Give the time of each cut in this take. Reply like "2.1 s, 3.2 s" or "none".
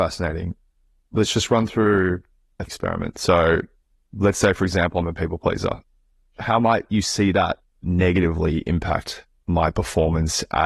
2.7 s